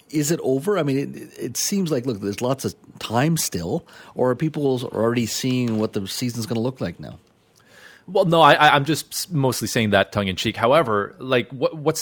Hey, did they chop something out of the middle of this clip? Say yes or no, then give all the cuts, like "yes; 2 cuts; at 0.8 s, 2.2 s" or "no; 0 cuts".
no; 0 cuts